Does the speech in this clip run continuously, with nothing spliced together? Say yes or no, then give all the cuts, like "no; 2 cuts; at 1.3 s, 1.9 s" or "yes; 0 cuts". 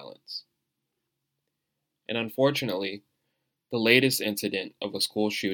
yes; 0 cuts